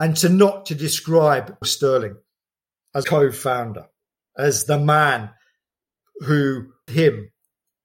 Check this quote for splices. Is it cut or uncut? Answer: cut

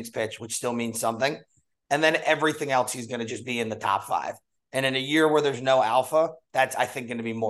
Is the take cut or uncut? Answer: uncut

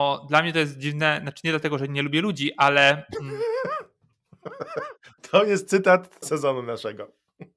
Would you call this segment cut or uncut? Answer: cut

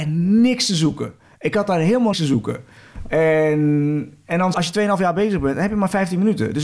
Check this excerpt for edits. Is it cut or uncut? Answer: cut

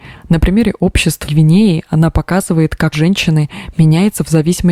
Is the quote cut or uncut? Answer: cut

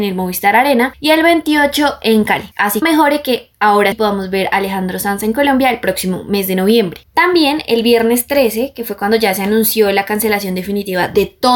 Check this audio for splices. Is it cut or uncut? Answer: cut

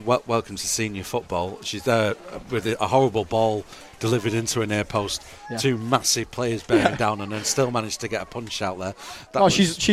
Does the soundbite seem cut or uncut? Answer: uncut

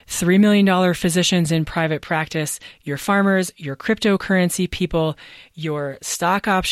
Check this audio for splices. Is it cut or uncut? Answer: uncut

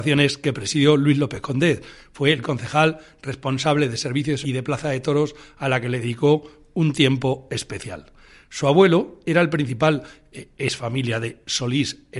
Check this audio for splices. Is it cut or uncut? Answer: cut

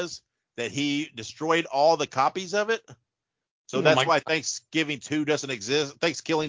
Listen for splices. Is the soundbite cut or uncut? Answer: uncut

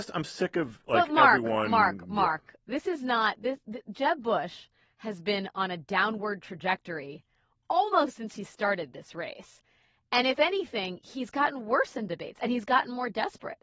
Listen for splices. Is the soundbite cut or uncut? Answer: uncut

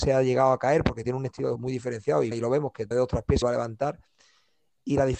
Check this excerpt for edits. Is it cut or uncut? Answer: cut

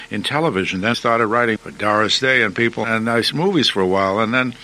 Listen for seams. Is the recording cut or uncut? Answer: cut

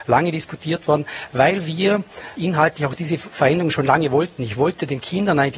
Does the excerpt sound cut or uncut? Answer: cut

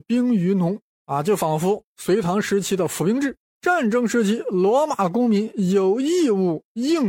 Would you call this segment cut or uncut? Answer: uncut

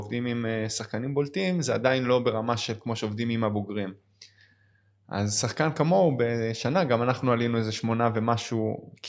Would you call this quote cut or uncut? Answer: uncut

